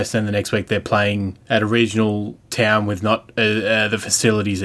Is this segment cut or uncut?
cut